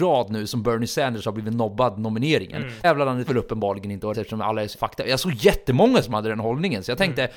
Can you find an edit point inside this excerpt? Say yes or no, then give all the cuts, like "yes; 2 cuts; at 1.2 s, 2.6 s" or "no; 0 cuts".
yes; 4 cuts; at 2.8 s, 3.3 s, 4.1 s, 4.7 s